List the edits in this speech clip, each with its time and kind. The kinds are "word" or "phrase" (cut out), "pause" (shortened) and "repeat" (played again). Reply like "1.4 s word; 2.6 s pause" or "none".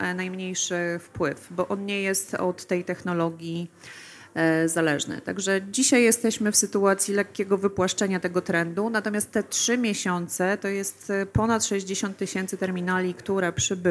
none